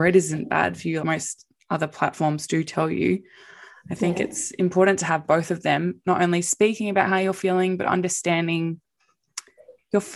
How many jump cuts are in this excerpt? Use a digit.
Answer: 2